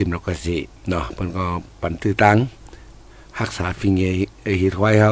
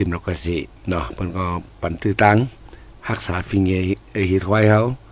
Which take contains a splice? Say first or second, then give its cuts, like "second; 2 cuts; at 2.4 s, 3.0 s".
second; 1 cut; at 3.0 s